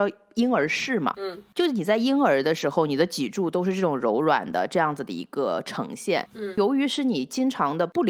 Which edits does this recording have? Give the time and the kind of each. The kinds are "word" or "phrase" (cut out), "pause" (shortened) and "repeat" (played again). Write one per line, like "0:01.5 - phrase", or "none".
none